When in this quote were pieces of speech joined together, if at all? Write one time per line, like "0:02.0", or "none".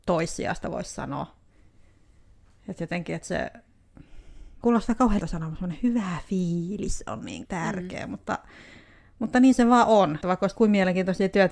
0:04.6
0:05.2
0:07.4
0:10.2